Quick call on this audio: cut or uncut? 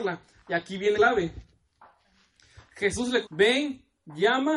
cut